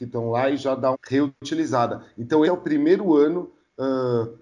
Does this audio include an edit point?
yes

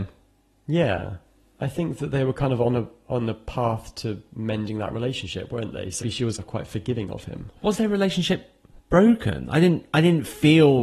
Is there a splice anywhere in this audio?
yes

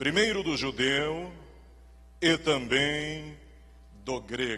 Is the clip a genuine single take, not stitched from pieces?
yes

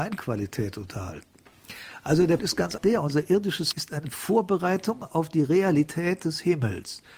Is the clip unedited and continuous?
no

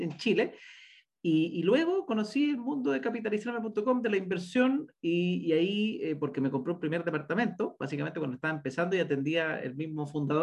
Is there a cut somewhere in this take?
no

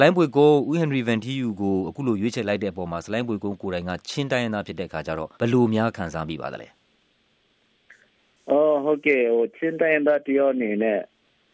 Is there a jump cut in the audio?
yes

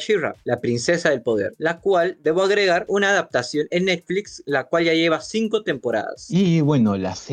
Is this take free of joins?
no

